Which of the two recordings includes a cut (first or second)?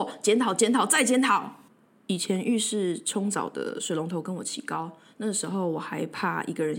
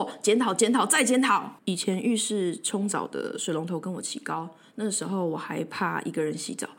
second